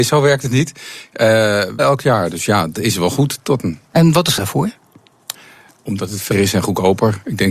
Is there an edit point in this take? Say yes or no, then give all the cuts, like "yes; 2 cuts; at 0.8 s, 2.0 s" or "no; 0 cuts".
yes; 4 cuts; at 1.8 s, 2.7 s, 4.4 s, 6.3 s